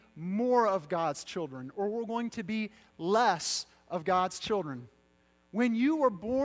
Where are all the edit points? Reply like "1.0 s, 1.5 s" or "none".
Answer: none